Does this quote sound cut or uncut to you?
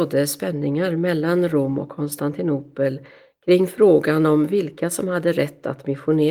uncut